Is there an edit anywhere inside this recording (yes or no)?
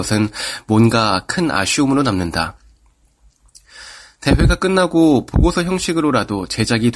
no